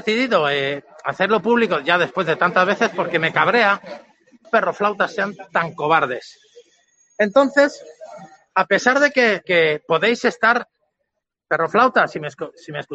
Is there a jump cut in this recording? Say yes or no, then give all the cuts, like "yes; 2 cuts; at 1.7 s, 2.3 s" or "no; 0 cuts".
yes; 2 cuts; at 4.4 s, 9.4 s